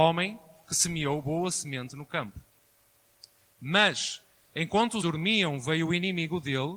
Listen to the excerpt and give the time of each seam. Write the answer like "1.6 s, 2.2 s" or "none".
5.0 s